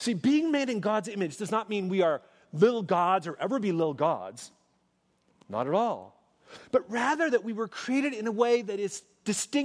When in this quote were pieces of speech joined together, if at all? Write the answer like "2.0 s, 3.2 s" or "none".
none